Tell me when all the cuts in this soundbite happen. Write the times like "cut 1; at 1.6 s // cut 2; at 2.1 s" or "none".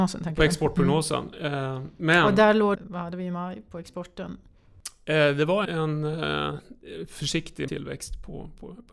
cut 1; at 2.7 s // cut 2; at 5.6 s // cut 3; at 7.7 s